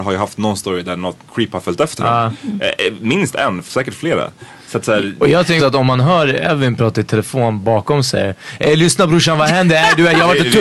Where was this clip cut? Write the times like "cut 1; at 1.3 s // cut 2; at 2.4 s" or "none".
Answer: cut 1; at 1.2 s // cut 2; at 5.6 s